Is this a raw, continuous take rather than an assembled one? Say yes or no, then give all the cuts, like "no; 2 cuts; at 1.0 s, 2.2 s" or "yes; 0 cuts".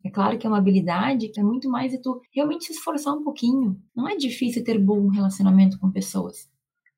no; 3 cuts; at 1.4 s, 2.3 s, 3.9 s